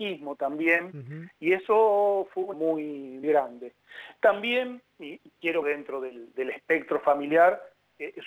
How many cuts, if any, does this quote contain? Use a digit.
4